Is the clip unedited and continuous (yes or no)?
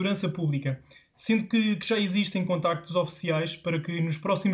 yes